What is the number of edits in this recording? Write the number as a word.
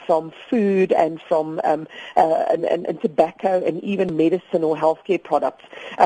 zero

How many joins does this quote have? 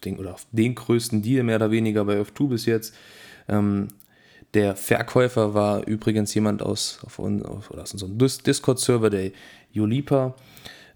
zero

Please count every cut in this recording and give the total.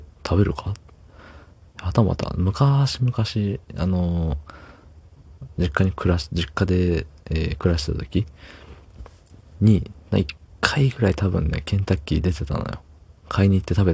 one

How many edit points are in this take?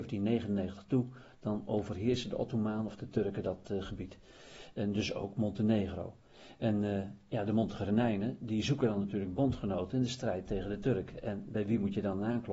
zero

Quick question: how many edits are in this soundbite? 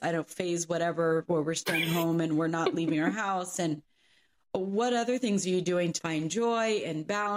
zero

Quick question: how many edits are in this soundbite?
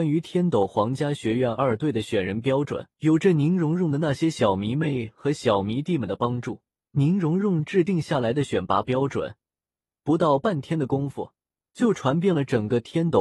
two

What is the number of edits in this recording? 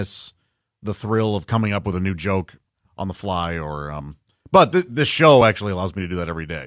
zero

